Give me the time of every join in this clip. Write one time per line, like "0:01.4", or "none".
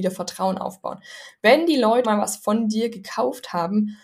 0:02.0